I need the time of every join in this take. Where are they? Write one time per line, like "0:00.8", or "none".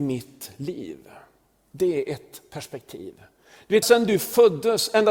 0:03.8